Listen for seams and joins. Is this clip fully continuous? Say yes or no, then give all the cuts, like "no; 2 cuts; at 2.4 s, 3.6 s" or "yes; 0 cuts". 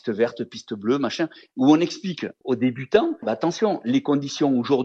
yes; 0 cuts